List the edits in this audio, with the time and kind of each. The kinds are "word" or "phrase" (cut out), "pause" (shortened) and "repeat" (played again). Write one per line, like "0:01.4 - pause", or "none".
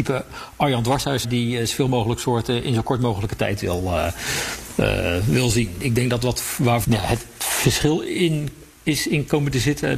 0:01.2 - phrase
0:06.8 - phrase